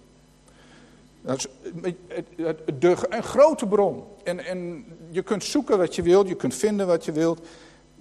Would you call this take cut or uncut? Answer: uncut